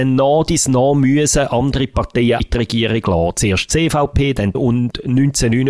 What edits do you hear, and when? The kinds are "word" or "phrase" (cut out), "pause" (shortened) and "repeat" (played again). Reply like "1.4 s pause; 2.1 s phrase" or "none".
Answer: 2.4 s word; 4.5 s phrase